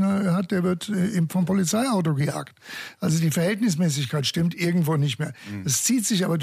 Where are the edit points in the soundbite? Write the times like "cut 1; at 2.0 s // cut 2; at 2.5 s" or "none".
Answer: cut 1; at 1.3 s